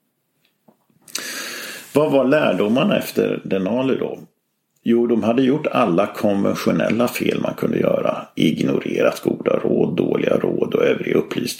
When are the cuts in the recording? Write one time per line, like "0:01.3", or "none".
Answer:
0:04.7